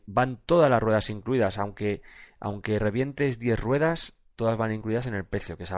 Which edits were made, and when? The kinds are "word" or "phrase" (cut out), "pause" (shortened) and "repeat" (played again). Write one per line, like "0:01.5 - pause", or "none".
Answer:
none